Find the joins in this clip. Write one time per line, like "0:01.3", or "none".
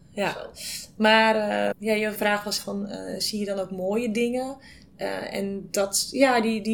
0:01.7
0:02.2
0:02.6